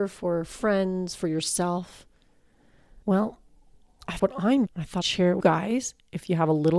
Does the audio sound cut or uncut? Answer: cut